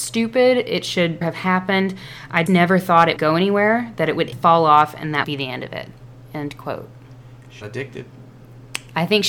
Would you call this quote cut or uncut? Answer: cut